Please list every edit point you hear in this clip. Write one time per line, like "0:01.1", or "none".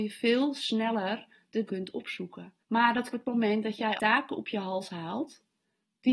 0:01.7
0:02.6
0:03.1
0:04.0